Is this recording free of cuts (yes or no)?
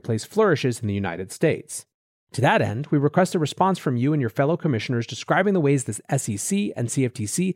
yes